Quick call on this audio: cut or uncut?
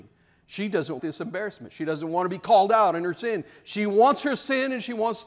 cut